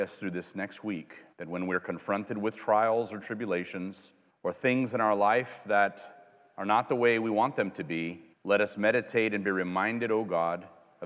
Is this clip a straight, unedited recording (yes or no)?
no